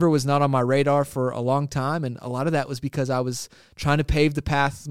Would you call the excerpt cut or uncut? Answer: uncut